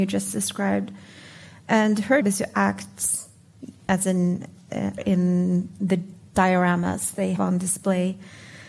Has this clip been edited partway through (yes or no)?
yes